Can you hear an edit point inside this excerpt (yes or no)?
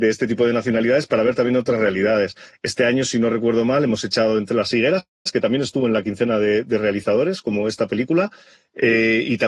no